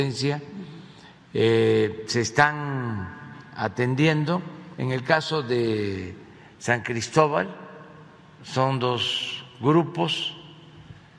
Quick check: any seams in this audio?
no; 0 cuts

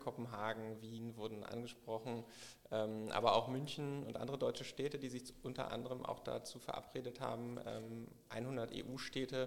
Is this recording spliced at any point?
no; 0 cuts

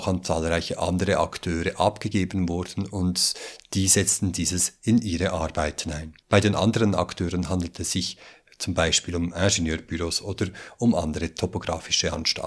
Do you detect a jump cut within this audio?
no; 0 cuts

